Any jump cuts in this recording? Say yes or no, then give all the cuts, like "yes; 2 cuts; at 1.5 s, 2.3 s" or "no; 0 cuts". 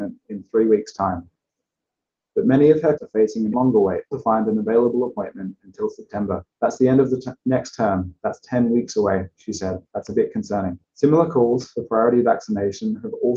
yes; 6 cuts; at 3.0 s, 3.5 s, 4.1 s, 6.5 s, 9.9 s, 10.8 s